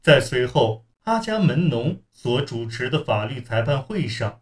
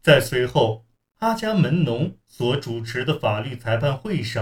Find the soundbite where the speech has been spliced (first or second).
first